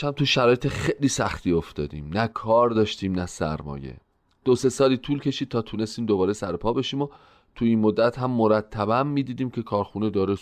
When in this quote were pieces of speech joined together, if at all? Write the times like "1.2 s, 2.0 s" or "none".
none